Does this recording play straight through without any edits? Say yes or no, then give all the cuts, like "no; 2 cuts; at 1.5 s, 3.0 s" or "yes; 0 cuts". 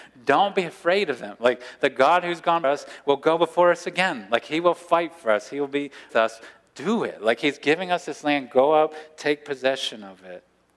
no; 2 cuts; at 2.6 s, 6.1 s